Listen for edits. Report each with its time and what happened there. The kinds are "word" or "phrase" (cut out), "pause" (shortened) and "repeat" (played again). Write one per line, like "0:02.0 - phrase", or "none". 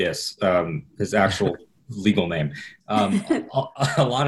none